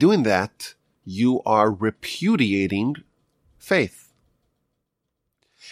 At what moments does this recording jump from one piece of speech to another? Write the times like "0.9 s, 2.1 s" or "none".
none